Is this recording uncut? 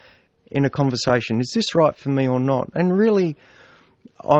yes; 0 cuts

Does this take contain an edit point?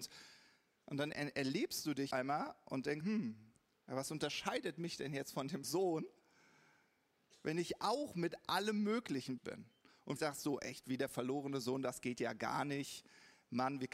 yes; 6 cuts; at 1.1 s, 2.1 s, 3.0 s, 5.6 s, 9.4 s, 10.2 s

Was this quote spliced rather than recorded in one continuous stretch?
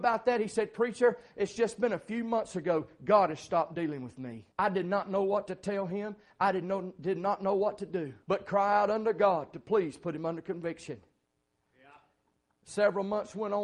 yes; 2 cuts; at 4.5 s, 8.2 s

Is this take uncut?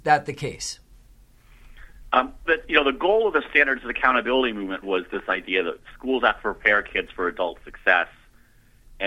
no; 2 cuts; at 2.5 s, 4.8 s

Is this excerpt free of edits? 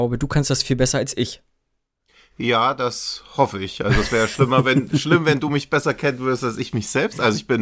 yes; 0 cuts

